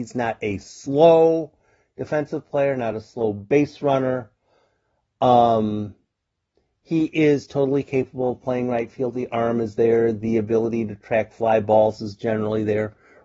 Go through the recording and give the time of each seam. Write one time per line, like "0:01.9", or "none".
none